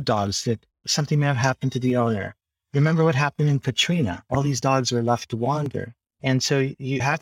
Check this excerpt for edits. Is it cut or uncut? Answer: uncut